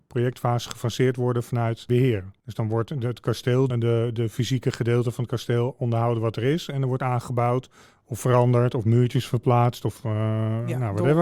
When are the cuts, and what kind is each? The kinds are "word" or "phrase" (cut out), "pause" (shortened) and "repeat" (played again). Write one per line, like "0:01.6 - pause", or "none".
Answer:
0:03.7 - word